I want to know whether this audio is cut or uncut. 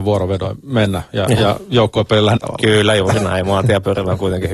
cut